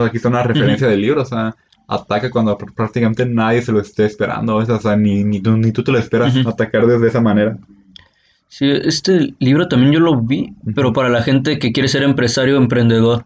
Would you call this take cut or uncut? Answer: uncut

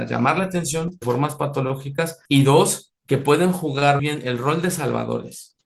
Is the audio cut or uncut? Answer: cut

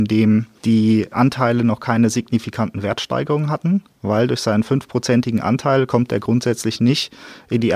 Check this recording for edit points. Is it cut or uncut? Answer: uncut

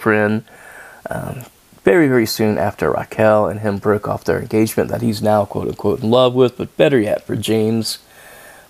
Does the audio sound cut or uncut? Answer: uncut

